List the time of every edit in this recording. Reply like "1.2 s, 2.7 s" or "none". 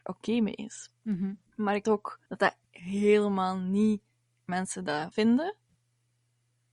1.5 s, 1.8 s, 2.3 s, 2.7 s, 4.5 s, 5.1 s